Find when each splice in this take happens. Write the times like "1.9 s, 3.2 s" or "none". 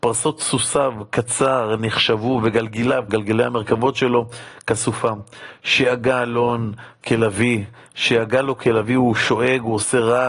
3.1 s